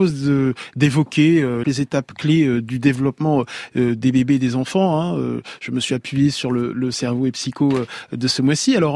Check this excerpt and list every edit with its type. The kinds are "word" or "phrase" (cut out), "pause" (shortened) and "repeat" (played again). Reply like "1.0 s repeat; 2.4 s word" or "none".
1.6 s phrase